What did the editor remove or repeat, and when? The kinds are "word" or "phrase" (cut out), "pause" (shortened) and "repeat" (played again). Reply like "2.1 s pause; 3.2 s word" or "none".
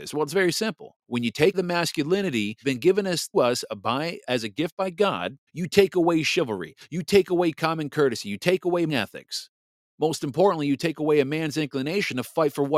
1.0 s pause; 1.5 s word; 2.6 s phrase; 3.3 s word; 4.3 s word; 5.5 s pause; 8.9 s phrase; 9.8 s pause